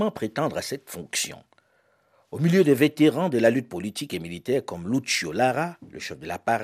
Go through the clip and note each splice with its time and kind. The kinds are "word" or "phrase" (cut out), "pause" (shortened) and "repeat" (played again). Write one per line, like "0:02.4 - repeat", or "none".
none